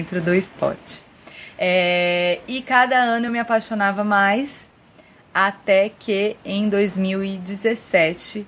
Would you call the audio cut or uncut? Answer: uncut